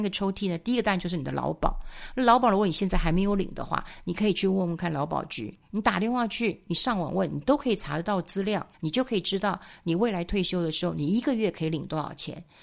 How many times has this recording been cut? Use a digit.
1